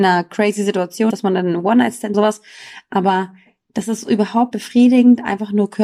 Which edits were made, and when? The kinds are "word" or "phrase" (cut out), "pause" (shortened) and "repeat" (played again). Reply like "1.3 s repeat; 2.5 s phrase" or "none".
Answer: 1.1 s word; 2.1 s word; 4.5 s word